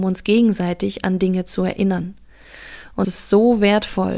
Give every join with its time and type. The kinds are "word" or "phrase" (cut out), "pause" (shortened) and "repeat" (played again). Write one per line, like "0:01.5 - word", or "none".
0:03.0 - word